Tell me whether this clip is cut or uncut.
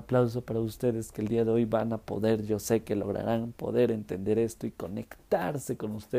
uncut